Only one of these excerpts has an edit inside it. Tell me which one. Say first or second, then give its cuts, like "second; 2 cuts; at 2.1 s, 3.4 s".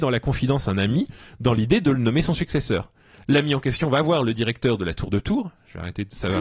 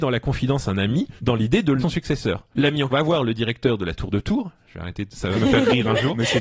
second; 5 cuts; at 1.2 s, 1.8 s, 2.5 s, 2.9 s, 5.3 s